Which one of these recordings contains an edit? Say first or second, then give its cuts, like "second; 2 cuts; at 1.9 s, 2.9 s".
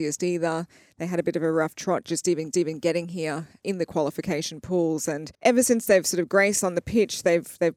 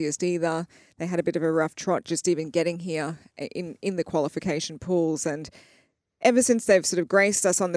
first; 4 cuts; at 2.5 s, 3.6 s, 5.3 s, 6.6 s